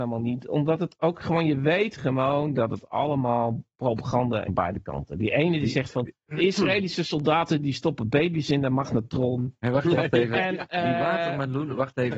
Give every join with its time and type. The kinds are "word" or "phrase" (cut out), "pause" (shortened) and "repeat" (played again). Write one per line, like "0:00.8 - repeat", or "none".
0:04.5 - word
0:06.2 - pause
0:09.9 - word